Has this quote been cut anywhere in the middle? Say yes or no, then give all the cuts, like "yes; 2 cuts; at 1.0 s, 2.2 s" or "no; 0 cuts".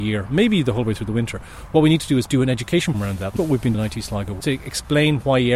yes; 4 cuts; at 2.3 s, 2.9 s, 3.4 s, 3.7 s